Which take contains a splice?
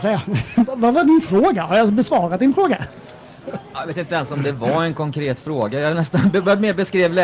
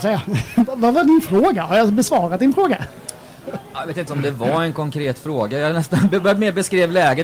second; 1 cut; at 4.1 s

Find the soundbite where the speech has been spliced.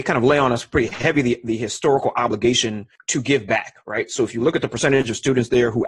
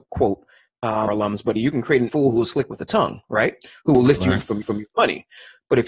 second; 4 cuts; at 1.1 s, 1.6 s, 2.1 s, 4.6 s

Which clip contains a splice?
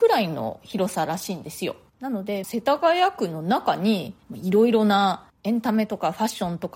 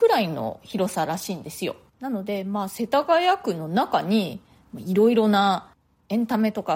first; 3 cuts; at 2.4 s, 4.2 s, 5.4 s

